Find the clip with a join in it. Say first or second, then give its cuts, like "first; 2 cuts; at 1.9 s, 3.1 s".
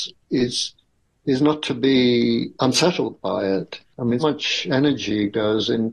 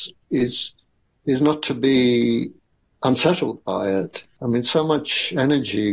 first; 2 cuts; at 2.5 s, 4.2 s